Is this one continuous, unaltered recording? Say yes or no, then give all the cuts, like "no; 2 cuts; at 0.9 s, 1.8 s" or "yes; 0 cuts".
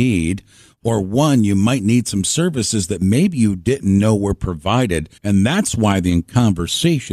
no; 1 cut; at 5.2 s